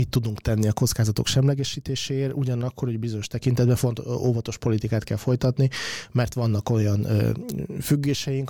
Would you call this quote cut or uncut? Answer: uncut